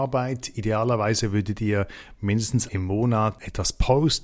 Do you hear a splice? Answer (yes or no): yes